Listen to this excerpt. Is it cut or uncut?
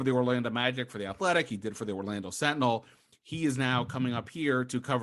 uncut